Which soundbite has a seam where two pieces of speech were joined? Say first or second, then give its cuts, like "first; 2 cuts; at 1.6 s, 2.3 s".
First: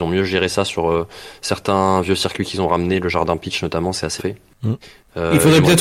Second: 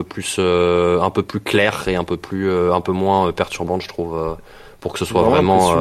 first; 1 cut; at 4.2 s